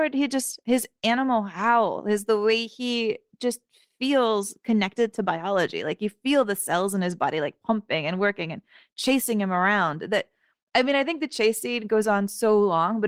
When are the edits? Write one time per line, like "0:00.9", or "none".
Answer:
none